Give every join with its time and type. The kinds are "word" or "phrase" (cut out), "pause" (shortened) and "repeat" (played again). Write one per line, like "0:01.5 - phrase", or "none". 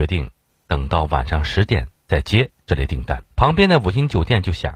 0:02.0 - pause
0:03.3 - pause